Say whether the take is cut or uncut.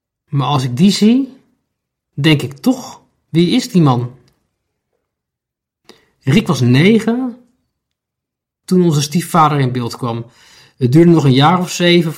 uncut